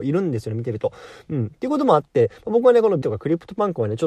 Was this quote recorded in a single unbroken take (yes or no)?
no